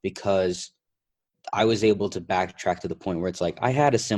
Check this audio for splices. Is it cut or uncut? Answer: uncut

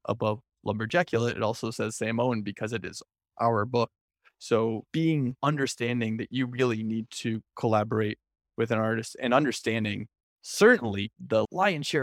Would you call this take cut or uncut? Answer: uncut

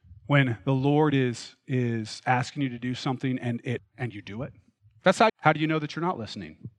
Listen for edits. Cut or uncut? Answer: cut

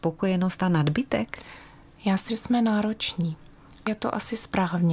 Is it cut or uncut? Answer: cut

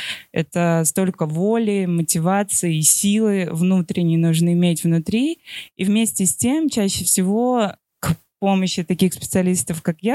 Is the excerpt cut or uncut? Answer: uncut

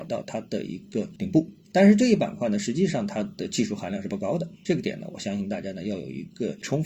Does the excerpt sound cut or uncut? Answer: uncut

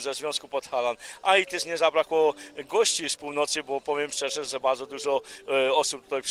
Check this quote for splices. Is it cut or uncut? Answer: uncut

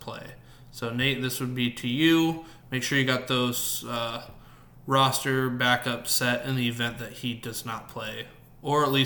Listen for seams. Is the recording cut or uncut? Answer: uncut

